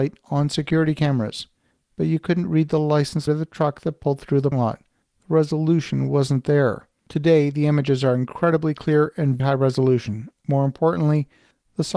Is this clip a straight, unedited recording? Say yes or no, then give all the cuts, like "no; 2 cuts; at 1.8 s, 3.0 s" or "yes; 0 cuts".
no; 3 cuts; at 3.3 s, 4.5 s, 9.4 s